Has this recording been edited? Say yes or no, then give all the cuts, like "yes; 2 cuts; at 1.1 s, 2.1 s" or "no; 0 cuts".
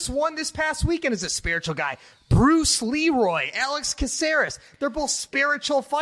no; 0 cuts